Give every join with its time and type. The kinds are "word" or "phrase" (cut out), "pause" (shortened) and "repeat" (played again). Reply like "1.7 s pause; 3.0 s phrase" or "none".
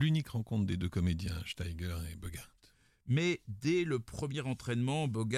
none